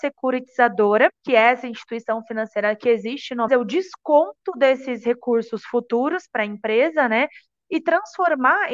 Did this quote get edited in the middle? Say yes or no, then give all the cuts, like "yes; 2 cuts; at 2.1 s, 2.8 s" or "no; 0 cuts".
yes; 2 cuts; at 1.1 s, 3.5 s